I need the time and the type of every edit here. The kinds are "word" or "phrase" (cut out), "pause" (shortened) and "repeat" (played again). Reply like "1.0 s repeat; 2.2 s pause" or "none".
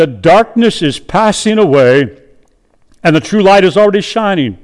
none